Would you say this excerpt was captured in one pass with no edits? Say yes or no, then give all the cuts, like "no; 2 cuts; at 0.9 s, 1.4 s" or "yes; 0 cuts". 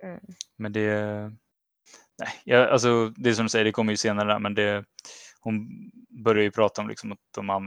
yes; 0 cuts